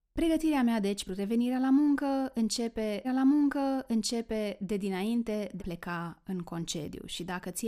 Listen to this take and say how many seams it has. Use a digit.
3